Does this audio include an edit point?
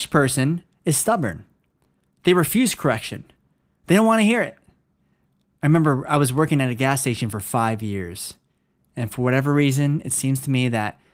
no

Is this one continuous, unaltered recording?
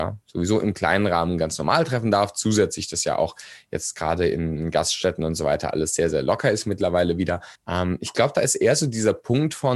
no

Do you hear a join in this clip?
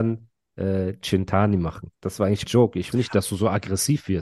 yes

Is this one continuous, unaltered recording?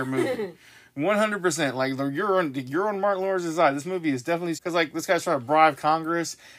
no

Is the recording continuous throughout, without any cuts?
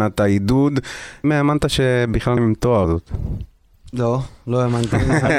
no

